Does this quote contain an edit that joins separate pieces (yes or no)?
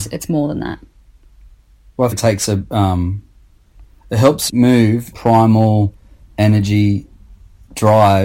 yes